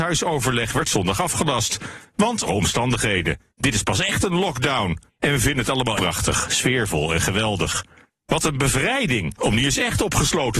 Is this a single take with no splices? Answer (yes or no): no